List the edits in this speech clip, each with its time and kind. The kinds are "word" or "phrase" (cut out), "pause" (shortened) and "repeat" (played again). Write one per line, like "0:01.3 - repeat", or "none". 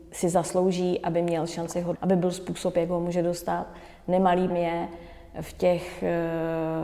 0:01.9 - word
0:04.5 - word